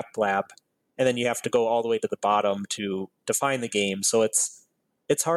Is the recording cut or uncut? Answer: uncut